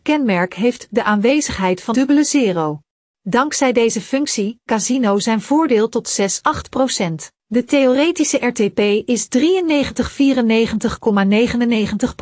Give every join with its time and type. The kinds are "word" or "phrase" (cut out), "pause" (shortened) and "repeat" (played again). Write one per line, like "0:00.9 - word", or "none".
0:01.9 - word
0:02.9 - pause
0:04.7 - phrase
0:07.3 - pause